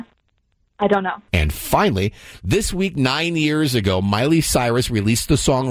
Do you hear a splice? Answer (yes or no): no